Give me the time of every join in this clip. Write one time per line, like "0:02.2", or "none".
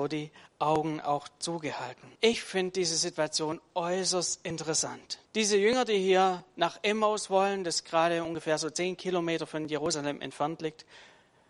0:02.2
0:05.2